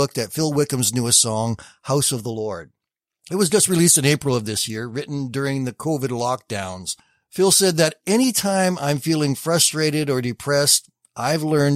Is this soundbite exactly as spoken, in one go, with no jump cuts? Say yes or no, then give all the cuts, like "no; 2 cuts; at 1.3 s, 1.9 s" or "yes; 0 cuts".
yes; 0 cuts